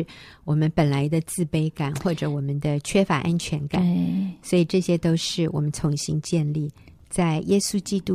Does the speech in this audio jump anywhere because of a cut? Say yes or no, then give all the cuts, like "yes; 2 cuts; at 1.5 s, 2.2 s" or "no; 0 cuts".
no; 0 cuts